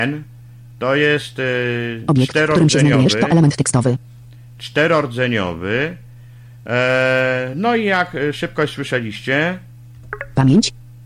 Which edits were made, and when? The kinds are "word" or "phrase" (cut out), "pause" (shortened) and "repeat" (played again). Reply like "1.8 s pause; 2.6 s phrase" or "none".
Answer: none